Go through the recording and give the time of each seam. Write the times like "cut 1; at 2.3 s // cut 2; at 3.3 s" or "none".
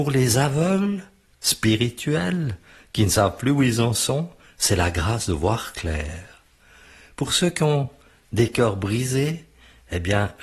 none